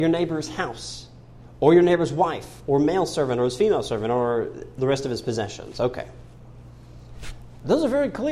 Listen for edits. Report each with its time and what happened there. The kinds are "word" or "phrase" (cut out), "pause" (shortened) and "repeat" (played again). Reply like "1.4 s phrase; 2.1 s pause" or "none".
none